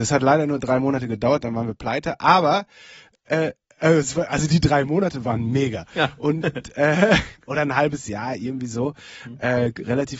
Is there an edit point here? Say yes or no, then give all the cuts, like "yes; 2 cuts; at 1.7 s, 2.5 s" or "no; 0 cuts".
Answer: no; 0 cuts